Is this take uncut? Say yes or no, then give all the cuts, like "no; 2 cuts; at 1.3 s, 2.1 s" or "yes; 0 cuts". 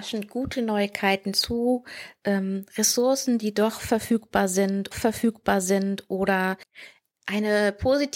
no; 1 cut; at 4.9 s